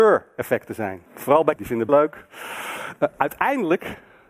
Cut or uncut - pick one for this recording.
cut